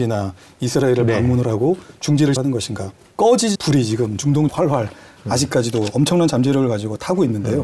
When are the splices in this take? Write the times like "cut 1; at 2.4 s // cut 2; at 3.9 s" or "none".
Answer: cut 1; at 2.4 s // cut 2; at 3.5 s // cut 3; at 4.5 s